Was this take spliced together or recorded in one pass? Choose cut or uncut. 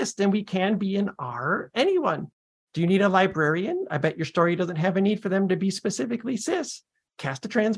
uncut